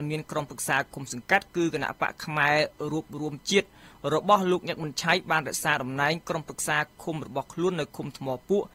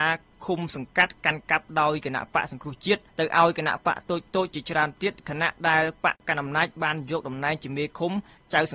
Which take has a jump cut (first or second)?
second